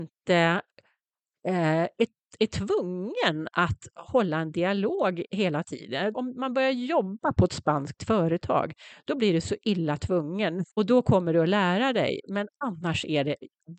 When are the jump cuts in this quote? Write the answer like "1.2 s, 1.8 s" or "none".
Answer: 6.1 s, 10.7 s